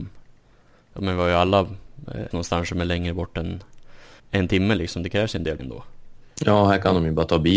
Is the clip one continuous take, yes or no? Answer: no